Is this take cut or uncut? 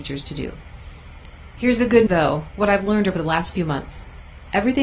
cut